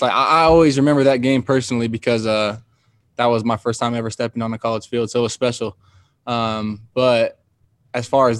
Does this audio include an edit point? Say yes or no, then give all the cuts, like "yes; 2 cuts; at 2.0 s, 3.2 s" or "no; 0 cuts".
no; 0 cuts